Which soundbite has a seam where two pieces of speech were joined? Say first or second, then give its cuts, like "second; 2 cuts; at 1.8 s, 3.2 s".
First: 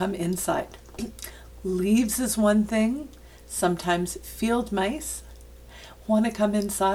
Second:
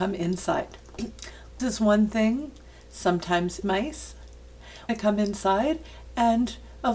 second; 3 cuts; at 1.6 s, 3.6 s, 4.9 s